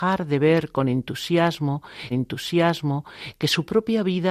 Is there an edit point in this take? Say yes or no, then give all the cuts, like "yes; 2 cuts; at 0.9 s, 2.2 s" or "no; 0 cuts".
yes; 1 cut; at 2.1 s